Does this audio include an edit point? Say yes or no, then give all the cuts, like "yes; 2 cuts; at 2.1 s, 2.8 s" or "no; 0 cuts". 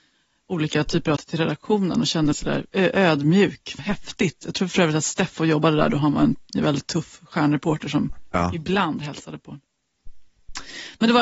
yes; 5 cuts; at 1.2 s, 2.3 s, 2.7 s, 3.8 s, 8.3 s